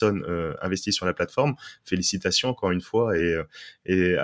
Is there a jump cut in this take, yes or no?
no